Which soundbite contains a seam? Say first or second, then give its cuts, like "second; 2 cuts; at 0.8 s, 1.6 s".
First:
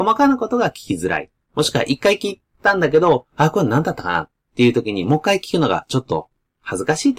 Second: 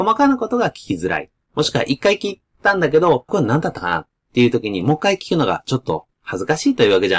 second; 2 cuts; at 3.3 s, 6.1 s